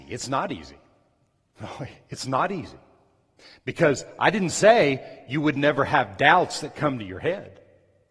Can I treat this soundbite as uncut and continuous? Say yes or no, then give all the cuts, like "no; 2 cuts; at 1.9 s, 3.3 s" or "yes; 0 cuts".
no; 1 cut; at 3.4 s